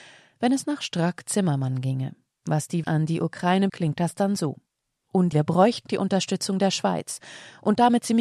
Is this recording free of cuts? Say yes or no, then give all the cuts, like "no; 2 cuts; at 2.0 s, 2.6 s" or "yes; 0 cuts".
no; 4 cuts; at 2.8 s, 3.7 s, 5.3 s, 5.9 s